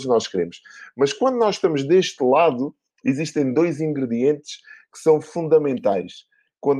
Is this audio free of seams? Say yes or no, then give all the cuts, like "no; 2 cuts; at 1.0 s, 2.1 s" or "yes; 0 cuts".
yes; 0 cuts